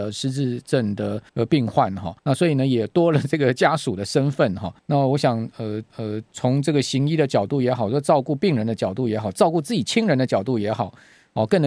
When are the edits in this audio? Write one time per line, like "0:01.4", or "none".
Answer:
0:01.3
0:02.2
0:04.8
0:05.9